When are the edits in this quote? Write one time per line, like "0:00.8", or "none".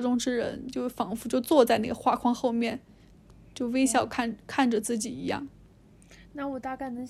none